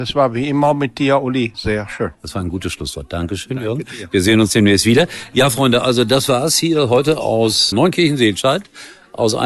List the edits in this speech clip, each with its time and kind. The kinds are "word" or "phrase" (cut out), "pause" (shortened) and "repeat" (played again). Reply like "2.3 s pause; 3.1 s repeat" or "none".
1.5 s word; 2.1 s pause; 7.7 s word